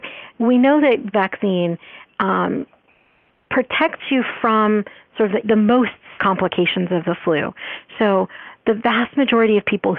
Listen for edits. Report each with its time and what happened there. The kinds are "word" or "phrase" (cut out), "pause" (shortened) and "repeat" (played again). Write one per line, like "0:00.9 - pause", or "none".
0:01.1 - phrase
0:05.4 - word
0:06.2 - word